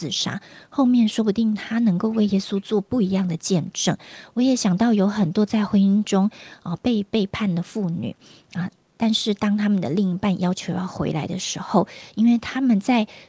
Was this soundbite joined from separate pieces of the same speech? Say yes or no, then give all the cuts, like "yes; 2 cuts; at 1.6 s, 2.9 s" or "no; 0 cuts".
no; 0 cuts